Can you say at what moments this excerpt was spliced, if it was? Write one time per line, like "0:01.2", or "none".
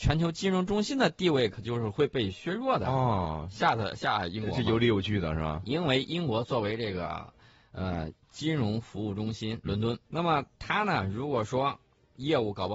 0:09.6
0:10.0